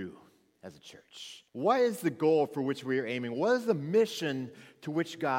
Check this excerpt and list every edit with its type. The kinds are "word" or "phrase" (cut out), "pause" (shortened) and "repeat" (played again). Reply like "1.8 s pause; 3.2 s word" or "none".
1.5 s pause